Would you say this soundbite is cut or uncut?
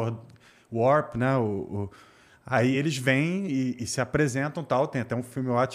uncut